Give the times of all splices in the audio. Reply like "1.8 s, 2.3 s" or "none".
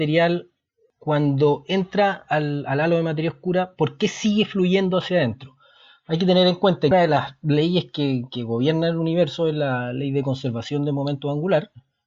6.9 s